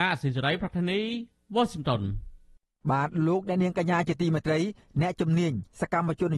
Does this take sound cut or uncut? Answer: uncut